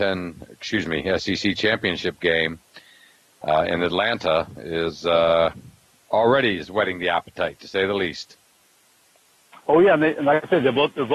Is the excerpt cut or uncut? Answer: uncut